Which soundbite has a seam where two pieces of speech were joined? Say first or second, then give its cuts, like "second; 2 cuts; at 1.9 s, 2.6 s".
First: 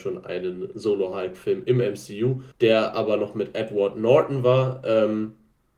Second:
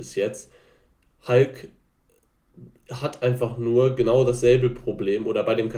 first; 1 cut; at 2.5 s